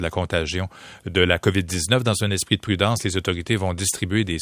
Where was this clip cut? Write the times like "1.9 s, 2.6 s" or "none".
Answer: none